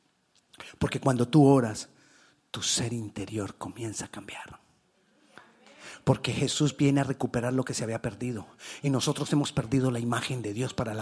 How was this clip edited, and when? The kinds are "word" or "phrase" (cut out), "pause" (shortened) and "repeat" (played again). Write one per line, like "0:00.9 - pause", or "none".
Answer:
none